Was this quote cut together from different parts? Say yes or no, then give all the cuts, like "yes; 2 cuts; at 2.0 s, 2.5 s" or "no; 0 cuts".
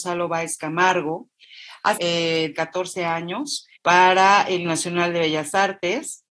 yes; 4 cuts; at 2.0 s, 2.5 s, 3.8 s, 4.6 s